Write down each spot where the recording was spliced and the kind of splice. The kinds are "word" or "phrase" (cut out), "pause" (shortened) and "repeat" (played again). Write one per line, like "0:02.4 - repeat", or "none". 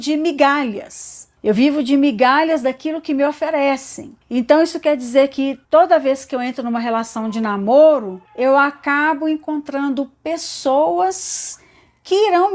0:01.4 - pause
0:04.2 - pause
0:05.6 - pause
0:08.3 - pause

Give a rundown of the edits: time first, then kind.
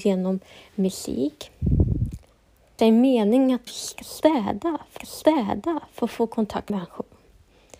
0:02.8 - word
0:03.7 - word
0:05.0 - repeat
0:06.7 - word

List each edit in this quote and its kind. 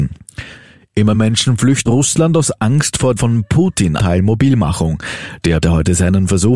0:01.1 - word
0:01.9 - word
0:03.2 - word
0:04.0 - word
0:05.6 - word

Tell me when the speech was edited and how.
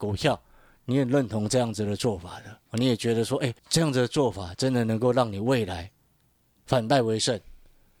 0:02.7 - pause
0:03.6 - pause

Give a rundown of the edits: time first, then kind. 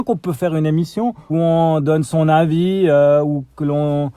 0:01.3 - phrase

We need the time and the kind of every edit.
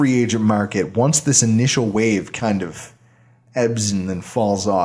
none

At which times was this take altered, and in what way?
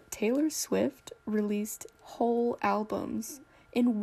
0:02.0 - word

